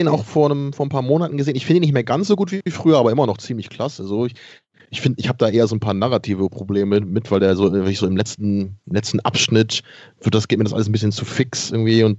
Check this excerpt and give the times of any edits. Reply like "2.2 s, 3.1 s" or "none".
none